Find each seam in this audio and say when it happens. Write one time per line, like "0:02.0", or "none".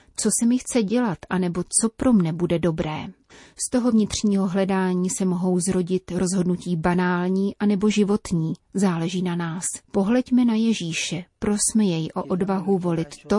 0:03.3
0:09.8

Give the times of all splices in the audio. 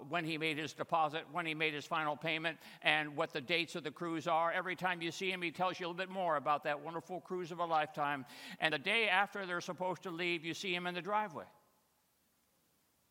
0:08.7

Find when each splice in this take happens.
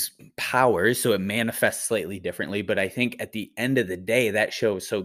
none

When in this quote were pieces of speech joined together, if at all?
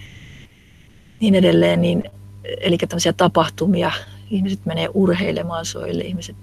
none

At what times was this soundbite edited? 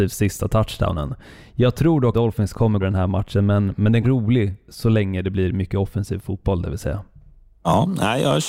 0:02.1
0:02.8
0:04.0

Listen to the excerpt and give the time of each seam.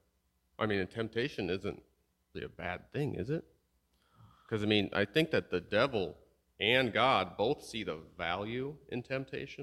0:02.3

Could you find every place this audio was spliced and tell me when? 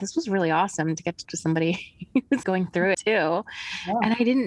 0:01.3
0:02.4
0:02.9

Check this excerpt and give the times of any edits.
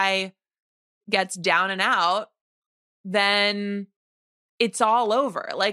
none

